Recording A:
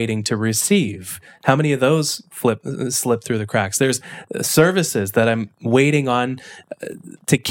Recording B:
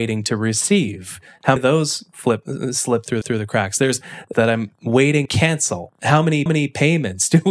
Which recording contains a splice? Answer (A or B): B